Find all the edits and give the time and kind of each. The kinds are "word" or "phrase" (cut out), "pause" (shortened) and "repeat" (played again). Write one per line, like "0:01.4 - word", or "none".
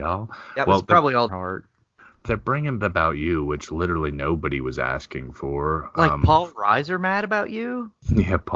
0:01.3 - phrase
0:02.8 - phrase